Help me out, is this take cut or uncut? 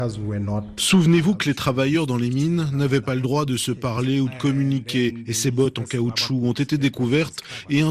uncut